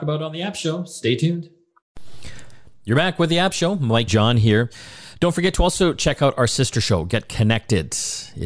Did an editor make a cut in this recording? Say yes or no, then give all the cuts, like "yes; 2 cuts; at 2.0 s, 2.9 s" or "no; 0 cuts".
yes; 1 cut; at 4.1 s